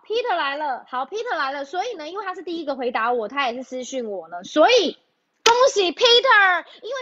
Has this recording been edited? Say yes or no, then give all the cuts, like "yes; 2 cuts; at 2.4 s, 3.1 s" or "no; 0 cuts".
no; 0 cuts